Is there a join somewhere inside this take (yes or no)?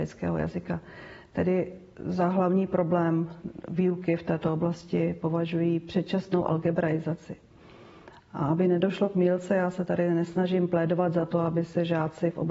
no